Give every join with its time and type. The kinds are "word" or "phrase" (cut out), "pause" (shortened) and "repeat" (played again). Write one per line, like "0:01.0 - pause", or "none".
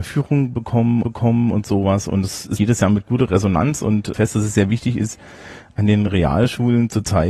0:01.0 - repeat
0:02.6 - word
0:04.1 - phrase
0:06.1 - word